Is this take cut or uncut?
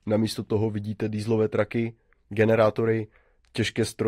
uncut